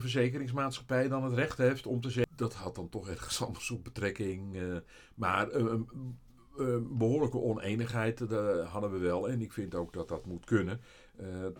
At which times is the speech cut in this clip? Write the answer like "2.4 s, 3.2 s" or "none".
none

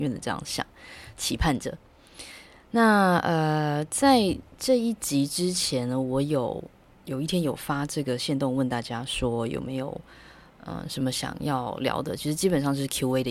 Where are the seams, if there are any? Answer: none

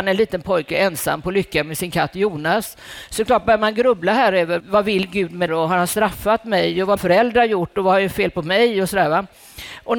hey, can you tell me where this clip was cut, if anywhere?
4.6 s, 5.5 s, 7.0 s

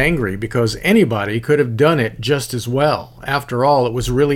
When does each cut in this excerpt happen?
none

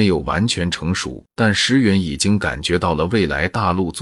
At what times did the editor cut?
1.3 s

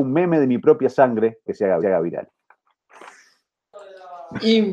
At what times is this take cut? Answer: 1.5 s, 1.8 s

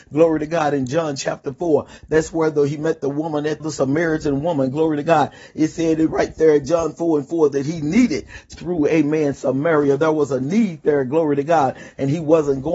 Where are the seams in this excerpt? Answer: 3.6 s, 8.5 s

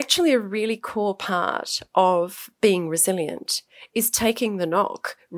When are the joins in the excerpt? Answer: none

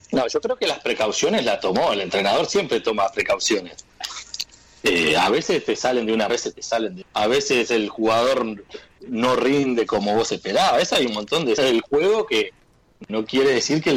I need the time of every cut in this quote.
6.3 s, 7.0 s, 11.6 s

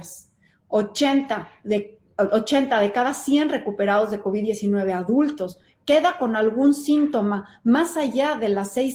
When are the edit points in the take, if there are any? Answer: none

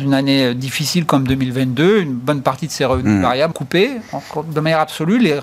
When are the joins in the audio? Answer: 3.5 s

